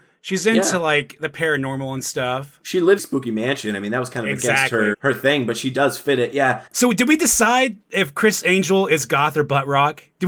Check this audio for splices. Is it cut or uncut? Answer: cut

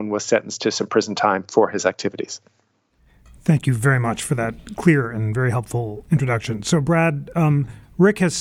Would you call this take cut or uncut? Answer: uncut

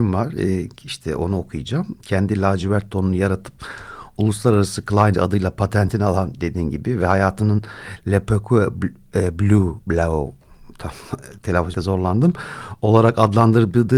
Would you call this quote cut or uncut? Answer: cut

